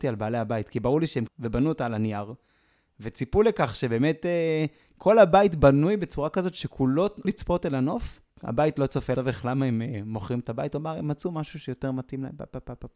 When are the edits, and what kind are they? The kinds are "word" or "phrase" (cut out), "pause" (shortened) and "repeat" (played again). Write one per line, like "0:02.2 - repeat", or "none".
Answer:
0:01.3 - phrase
0:07.2 - word
0:08.3 - pause
0:09.1 - phrase